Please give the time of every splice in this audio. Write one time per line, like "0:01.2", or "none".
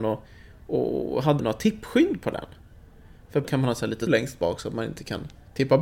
0:01.4
0:03.4
0:04.1